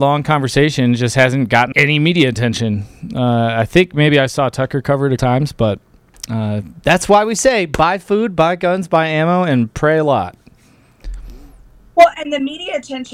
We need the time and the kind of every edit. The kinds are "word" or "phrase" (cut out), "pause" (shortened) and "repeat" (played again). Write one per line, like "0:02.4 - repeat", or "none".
0:01.7 - word
0:05.2 - word